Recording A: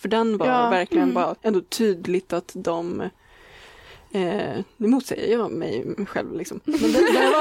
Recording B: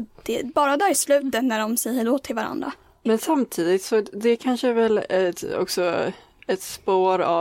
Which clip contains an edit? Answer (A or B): A